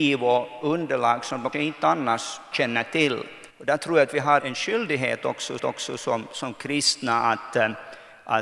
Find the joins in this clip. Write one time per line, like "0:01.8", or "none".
0:01.5
0:02.5
0:03.5
0:04.4
0:05.6